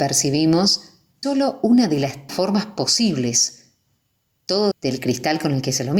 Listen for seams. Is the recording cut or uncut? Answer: cut